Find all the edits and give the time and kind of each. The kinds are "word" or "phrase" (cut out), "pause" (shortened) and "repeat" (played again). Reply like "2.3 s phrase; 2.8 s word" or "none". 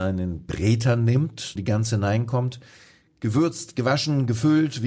1.6 s word